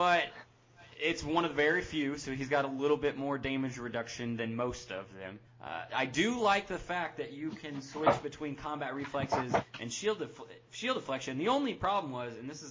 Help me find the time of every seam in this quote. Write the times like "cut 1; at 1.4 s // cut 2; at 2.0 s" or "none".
cut 1; at 5.5 s